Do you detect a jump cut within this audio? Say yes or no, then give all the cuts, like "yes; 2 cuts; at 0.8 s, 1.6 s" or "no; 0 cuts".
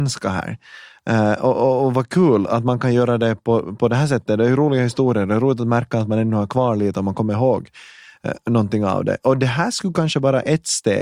no; 0 cuts